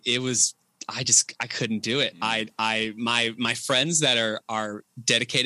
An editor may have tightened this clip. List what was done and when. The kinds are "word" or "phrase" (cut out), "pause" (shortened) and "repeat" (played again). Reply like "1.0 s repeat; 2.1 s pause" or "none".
none